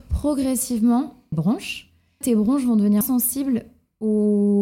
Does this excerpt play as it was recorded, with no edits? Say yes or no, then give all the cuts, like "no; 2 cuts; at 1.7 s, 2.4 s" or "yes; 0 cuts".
no; 3 cuts; at 1.3 s, 2.2 s, 3.0 s